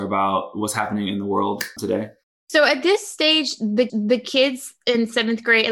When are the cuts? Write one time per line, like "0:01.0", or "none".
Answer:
0:01.8
0:02.2
0:03.9